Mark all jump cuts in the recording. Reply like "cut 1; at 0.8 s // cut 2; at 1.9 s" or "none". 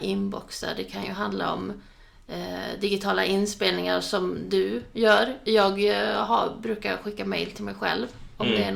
none